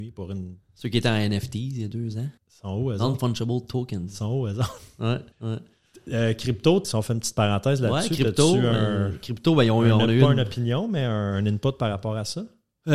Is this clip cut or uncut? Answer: cut